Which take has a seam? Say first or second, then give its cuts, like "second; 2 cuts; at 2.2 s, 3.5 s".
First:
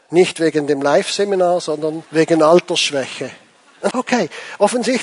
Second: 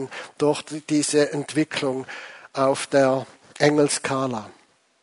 first; 2 cuts; at 2.1 s, 3.9 s